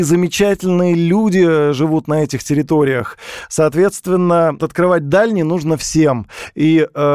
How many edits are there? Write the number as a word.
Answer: one